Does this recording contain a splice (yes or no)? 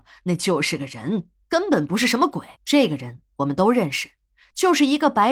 yes